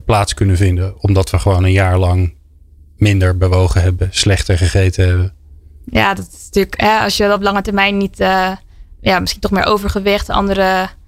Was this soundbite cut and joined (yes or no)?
no